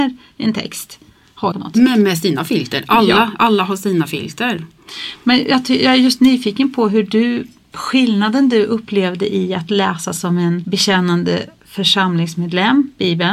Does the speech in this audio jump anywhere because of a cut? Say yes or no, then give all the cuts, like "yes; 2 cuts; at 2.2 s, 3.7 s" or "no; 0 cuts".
yes; 1 cut; at 1.5 s